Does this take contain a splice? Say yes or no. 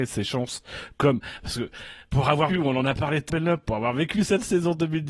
yes